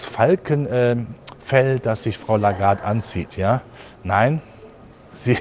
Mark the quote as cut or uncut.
uncut